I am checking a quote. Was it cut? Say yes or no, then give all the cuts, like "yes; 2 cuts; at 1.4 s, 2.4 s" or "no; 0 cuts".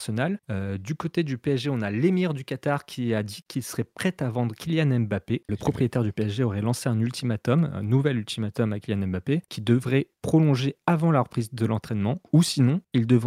no; 0 cuts